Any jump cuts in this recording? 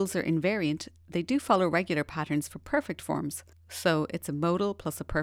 yes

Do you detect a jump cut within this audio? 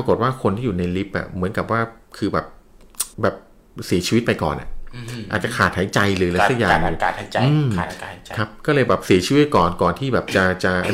yes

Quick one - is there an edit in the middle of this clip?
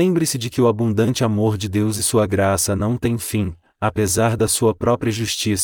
no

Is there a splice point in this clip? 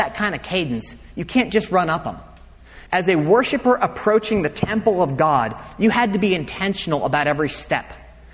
yes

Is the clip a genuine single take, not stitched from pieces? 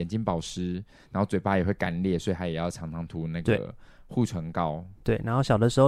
yes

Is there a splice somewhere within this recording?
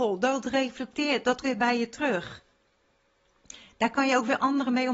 yes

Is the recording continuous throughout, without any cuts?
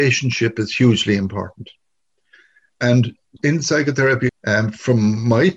no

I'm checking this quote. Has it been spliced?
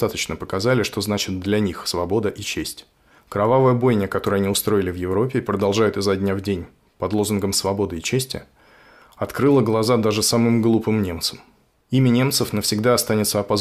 no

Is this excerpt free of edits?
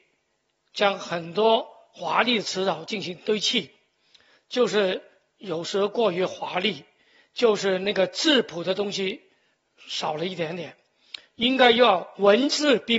yes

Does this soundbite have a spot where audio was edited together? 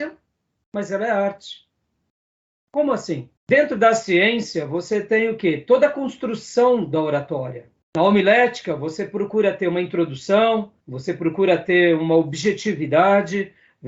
yes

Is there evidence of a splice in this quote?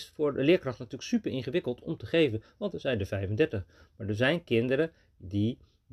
no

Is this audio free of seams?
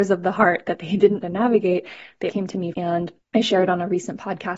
no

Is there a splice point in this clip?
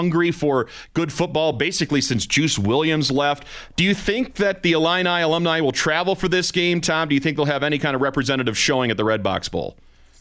no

